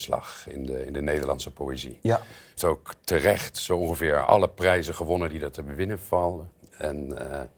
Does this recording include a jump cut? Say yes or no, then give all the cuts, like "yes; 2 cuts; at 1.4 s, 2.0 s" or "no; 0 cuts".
yes; 1 cut; at 2.6 s